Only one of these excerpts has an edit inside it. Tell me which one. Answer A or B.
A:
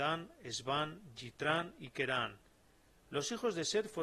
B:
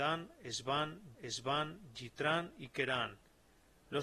B